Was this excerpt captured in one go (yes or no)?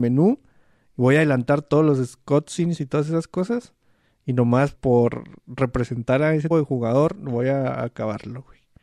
no